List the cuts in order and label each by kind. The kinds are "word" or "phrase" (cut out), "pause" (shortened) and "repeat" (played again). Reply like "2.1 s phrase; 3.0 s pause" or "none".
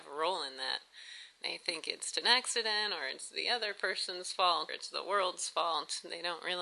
2.1 s word; 4.7 s word